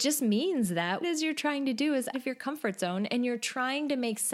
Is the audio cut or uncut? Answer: cut